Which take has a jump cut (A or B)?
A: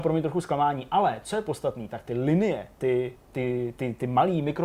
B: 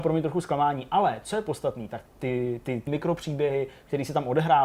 B